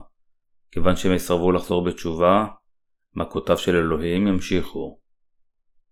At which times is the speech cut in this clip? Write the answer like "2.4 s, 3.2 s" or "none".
none